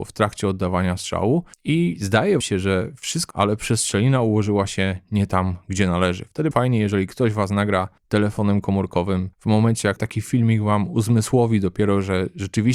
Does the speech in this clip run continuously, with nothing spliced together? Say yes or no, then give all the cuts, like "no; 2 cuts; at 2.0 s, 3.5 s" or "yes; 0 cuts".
no; 7 cuts; at 1.5 s, 2.4 s, 3.3 s, 6.5 s, 8.0 s, 9.3 s, 10.0 s